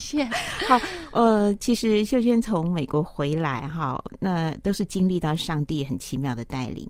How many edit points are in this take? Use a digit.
0